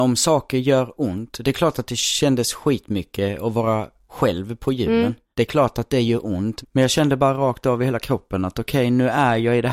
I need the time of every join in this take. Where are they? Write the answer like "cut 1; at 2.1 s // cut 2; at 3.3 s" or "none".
none